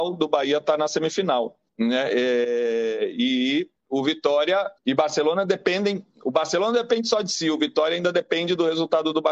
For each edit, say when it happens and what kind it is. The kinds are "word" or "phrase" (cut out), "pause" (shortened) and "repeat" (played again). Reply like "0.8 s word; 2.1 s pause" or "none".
1.7 s pause; 3.8 s pause; 4.8 s pause

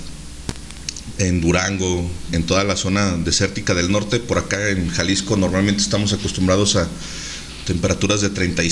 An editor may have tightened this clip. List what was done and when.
2.3 s word

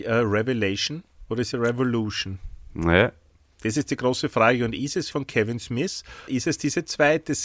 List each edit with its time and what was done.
1.5 s word; 5.1 s word; 6.3 s word

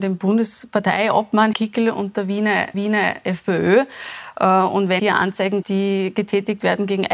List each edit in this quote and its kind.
1.5 s word; 2.7 s repeat; 5.0 s word; 5.6 s word

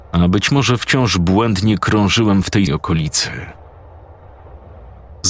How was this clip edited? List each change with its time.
2.7 s word

